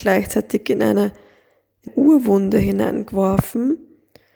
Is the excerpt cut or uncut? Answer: cut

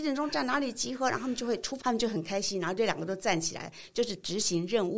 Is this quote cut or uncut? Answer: cut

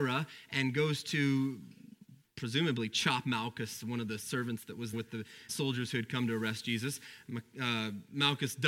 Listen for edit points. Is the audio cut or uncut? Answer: cut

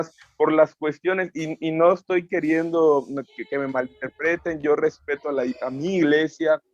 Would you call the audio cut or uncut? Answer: uncut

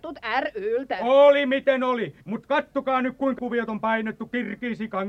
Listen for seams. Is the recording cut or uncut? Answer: cut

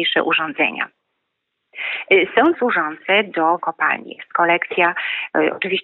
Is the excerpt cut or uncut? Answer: cut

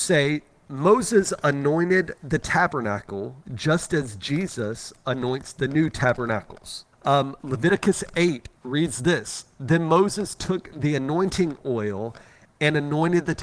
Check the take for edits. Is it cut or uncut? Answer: cut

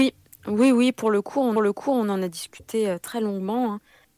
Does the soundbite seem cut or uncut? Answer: cut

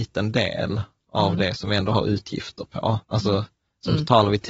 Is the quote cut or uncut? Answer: cut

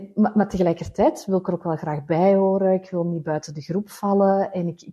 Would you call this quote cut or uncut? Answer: uncut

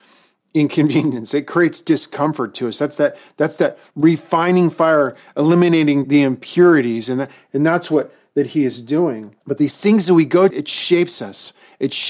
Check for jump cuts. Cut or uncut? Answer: cut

